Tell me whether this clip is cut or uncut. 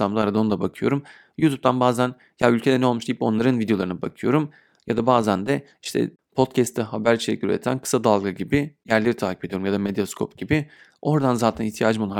uncut